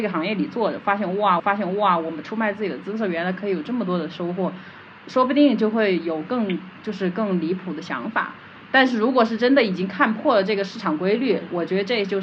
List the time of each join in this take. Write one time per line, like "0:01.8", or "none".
0:01.4